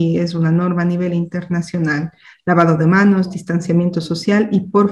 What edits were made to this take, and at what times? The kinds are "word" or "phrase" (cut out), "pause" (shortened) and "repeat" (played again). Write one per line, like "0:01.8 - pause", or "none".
none